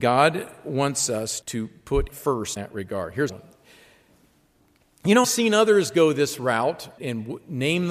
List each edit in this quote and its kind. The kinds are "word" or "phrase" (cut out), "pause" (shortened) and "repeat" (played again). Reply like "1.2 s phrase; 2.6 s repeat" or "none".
1.4 s word; 2.1 s word; 2.6 s word; 3.3 s word; 5.2 s word; 7.0 s word